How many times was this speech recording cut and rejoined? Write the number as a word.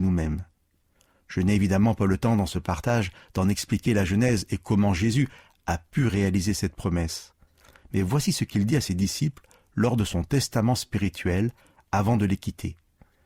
zero